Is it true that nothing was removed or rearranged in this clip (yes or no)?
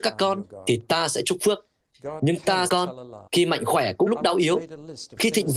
no